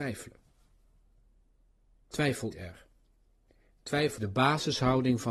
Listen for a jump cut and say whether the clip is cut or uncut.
cut